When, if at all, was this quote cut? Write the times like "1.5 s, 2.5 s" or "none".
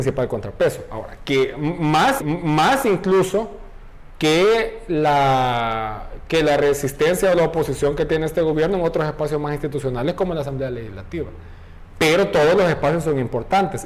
2.2 s